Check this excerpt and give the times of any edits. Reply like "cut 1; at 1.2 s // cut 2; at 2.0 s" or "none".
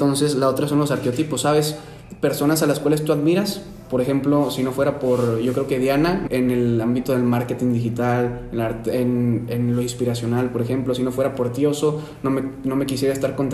cut 1; at 6.3 s